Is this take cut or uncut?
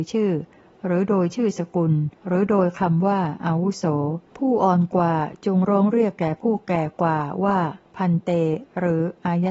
cut